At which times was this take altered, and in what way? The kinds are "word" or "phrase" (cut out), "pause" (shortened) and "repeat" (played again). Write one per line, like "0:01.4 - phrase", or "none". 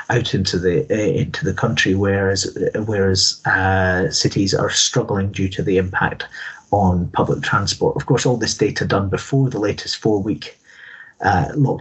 none